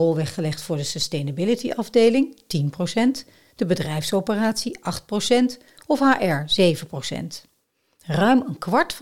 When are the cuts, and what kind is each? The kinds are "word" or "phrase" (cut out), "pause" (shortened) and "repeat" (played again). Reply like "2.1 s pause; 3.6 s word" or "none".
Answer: none

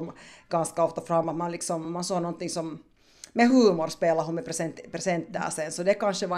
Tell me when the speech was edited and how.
none

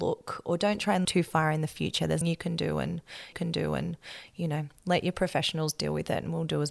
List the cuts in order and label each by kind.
1.0 s word; 2.2 s word; 3.3 s repeat

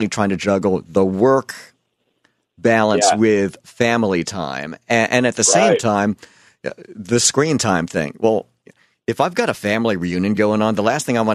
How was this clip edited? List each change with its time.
none

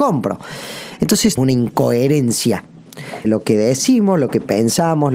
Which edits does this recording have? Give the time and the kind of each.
1.4 s phrase; 3.2 s word

